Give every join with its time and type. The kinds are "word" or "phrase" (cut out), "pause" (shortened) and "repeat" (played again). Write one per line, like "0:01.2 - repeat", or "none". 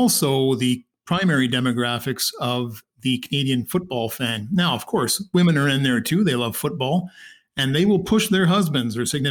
none